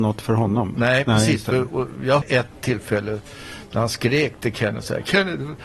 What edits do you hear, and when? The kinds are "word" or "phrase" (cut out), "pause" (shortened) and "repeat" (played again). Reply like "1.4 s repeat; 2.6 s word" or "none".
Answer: 2.2 s word